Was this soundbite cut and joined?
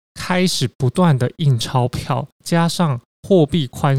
yes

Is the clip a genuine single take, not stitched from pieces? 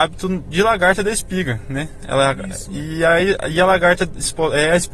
yes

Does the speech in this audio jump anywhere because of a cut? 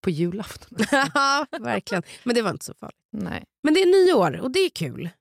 no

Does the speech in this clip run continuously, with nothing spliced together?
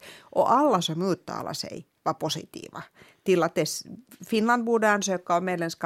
yes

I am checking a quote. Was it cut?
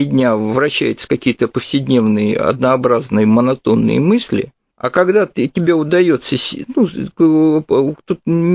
yes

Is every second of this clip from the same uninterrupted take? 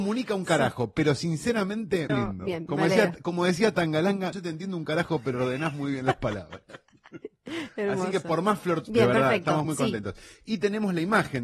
no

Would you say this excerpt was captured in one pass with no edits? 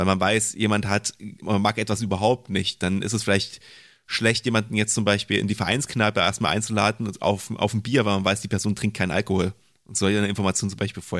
yes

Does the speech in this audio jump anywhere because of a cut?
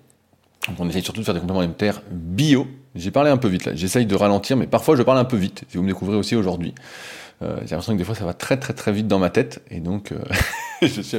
no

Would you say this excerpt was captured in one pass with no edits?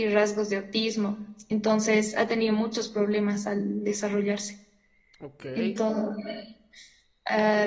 yes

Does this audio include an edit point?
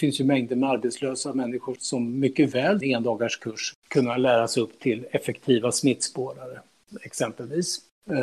yes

